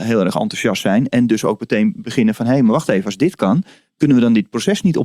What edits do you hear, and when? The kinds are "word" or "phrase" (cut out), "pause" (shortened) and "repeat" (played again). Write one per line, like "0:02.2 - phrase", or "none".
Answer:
none